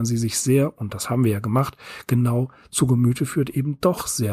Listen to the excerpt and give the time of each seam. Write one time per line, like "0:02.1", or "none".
none